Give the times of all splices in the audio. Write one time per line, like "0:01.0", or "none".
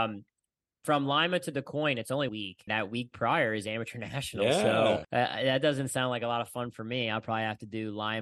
0:02.3
0:02.7
0:05.0